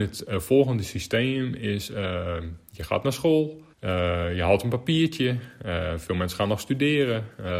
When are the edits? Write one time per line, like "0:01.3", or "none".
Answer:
0:03.7